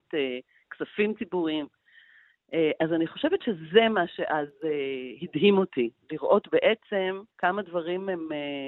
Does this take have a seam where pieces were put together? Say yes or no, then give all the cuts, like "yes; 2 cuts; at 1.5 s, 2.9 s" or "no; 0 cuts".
yes; 1 cut; at 7.3 s